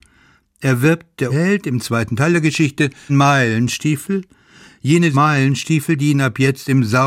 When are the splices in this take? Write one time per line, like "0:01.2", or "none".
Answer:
0:01.3
0:03.1
0:05.1